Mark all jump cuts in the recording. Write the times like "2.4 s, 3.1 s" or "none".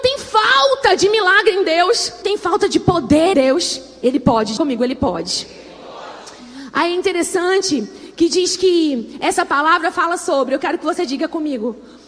2.2 s, 3.3 s, 4.6 s